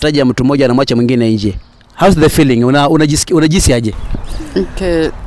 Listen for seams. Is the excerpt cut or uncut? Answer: uncut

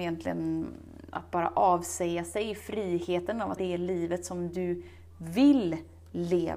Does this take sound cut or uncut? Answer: cut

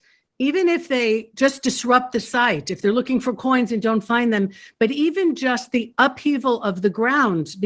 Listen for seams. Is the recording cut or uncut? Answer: uncut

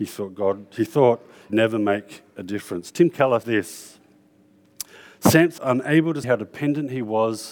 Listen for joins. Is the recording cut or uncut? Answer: cut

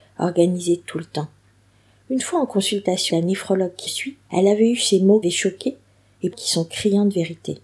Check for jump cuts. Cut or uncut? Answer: cut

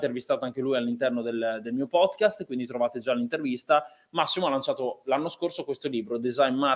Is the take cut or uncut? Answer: uncut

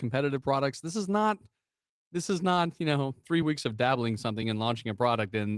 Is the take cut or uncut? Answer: uncut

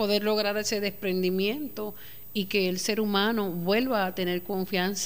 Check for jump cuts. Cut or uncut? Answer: uncut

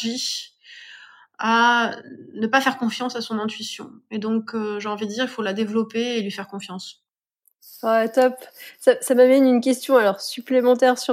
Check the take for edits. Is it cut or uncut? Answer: uncut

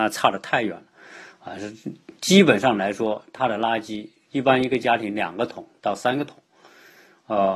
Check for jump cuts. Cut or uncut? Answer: uncut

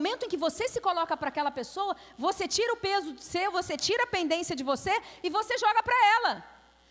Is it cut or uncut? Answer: uncut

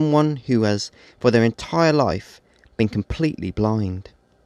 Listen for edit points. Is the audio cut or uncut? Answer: uncut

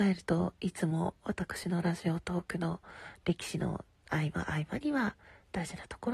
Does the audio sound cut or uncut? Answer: uncut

